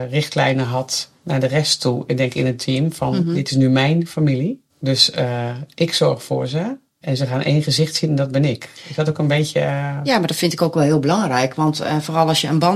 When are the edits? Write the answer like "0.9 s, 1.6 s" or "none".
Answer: 1.2 s, 4.7 s, 6.9 s

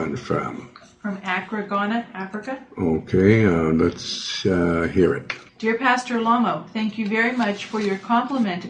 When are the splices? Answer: 5.5 s

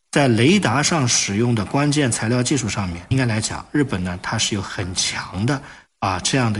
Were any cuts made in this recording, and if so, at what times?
3.1 s

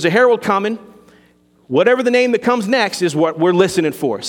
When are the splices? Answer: none

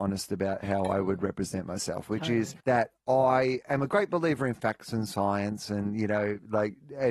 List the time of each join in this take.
2.6 s

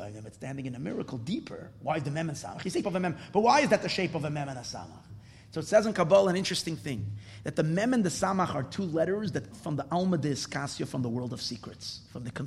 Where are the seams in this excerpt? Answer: 2.8 s, 9.5 s

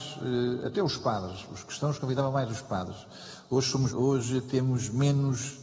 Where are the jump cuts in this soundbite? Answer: 3.9 s

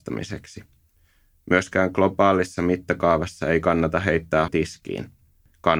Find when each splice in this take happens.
4.5 s

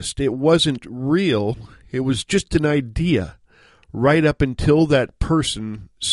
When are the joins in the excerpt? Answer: none

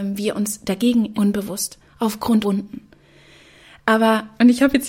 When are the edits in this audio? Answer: 1.1 s, 2.4 s

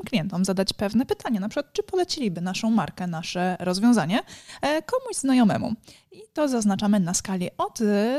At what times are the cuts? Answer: none

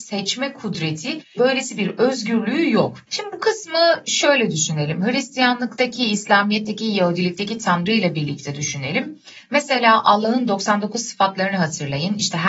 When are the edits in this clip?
3.0 s

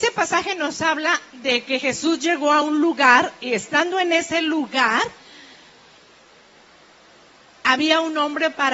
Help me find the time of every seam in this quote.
none

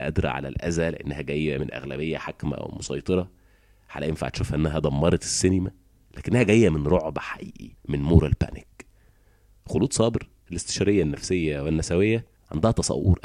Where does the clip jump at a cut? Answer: 7.8 s

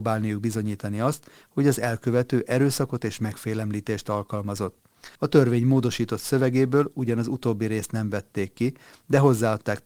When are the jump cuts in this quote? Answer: 5.2 s

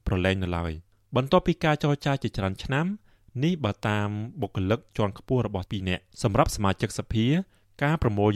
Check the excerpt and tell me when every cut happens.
4.9 s, 5.7 s, 6.1 s

